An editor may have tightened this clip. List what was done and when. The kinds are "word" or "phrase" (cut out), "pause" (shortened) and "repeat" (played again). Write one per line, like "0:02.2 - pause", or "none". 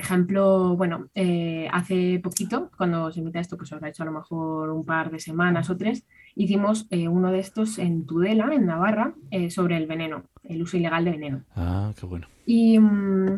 none